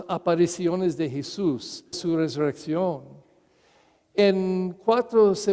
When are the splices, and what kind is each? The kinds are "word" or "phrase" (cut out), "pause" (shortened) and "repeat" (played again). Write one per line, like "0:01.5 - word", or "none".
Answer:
0:01.9 - word